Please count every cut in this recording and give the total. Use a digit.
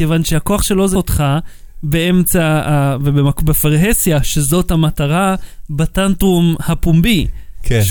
1